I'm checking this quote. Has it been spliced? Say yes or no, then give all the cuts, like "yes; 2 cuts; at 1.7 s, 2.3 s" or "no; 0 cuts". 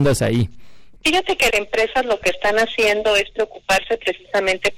yes; 2 cuts; at 1.0 s, 1.5 s